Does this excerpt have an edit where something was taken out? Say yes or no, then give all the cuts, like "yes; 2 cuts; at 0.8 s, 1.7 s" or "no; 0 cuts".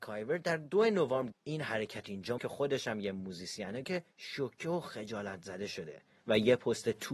yes; 3 cuts; at 1.3 s, 2.4 s, 3.8 s